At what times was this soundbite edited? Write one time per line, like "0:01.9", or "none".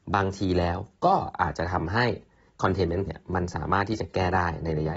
0:03.1